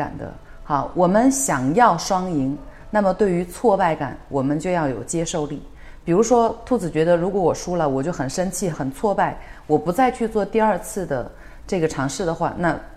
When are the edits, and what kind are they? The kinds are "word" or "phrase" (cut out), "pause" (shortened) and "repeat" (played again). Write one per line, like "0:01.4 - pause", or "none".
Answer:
0:08.7 - phrase